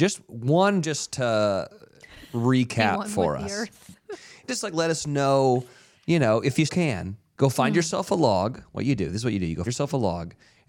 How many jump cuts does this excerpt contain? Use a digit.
3